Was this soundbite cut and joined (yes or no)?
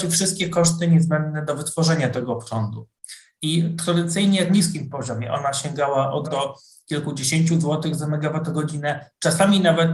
yes